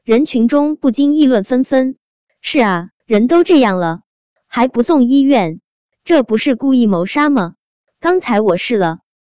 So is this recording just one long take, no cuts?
no; 1 cut; at 3.0 s

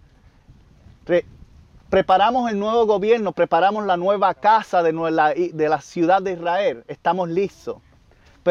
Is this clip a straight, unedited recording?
yes; 0 cuts

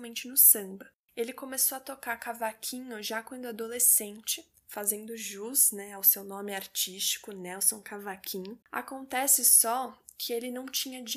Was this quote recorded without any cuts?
no; 2 cuts; at 0.9 s, 8.6 s

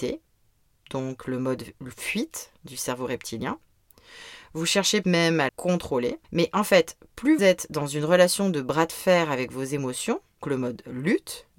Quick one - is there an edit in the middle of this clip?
yes; 5 cuts; at 5.0 s, 5.5 s, 6.2 s, 7.4 s, 10.4 s

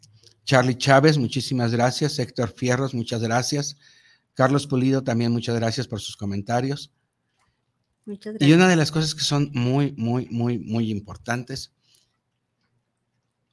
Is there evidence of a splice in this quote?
no; 0 cuts

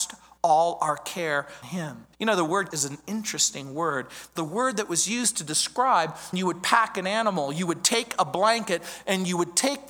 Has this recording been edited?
yes; 5 cuts; at 1.6 s, 2.1 s, 2.7 s, 4.4 s, 6.3 s

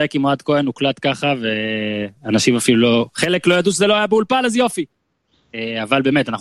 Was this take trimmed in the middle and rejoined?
no; 0 cuts

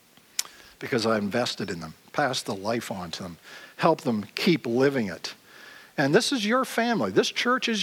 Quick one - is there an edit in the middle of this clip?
no; 0 cuts

